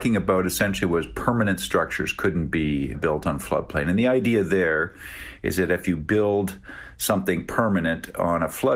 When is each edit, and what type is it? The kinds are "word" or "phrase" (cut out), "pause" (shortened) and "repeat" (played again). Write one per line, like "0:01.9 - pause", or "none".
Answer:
0:02.9 - word